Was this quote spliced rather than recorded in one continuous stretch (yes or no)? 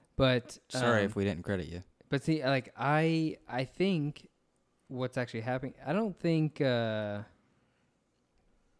no